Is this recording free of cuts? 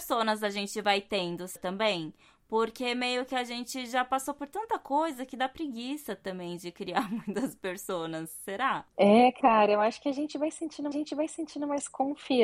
no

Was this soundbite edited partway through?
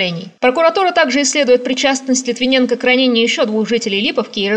no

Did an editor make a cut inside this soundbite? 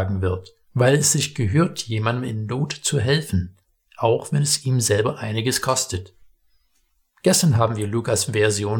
no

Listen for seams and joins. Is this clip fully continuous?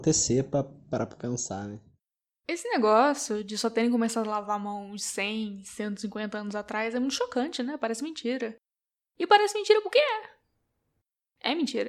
yes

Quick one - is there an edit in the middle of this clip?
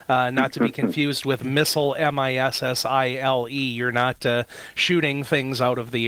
no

